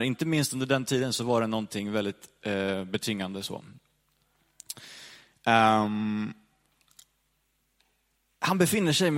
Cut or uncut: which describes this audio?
uncut